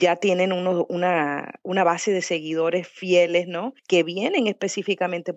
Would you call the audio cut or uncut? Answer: cut